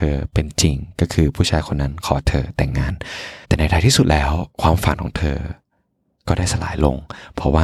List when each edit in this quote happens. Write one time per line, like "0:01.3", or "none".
0:03.4
0:04.5